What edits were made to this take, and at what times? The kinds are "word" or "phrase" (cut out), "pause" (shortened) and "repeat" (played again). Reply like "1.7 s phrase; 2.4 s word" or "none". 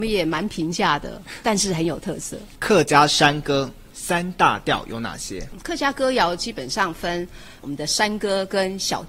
7.6 s word